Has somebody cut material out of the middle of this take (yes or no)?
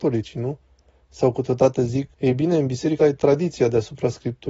yes